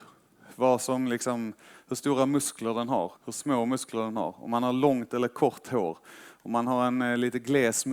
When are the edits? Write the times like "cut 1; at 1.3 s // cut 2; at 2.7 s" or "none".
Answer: cut 1; at 3.2 s